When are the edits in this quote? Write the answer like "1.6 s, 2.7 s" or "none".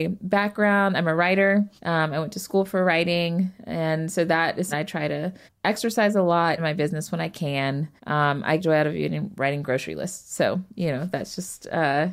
1.8 s, 4.7 s, 5.5 s, 6.6 s, 8.0 s, 8.6 s

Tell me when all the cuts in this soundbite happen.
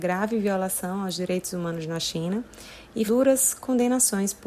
3.1 s

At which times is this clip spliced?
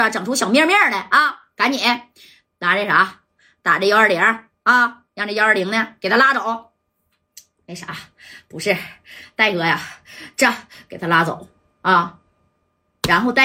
5.1 s

